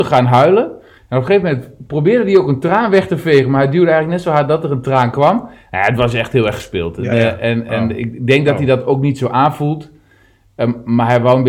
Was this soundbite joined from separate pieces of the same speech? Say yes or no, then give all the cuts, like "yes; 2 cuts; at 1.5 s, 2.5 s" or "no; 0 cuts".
no; 0 cuts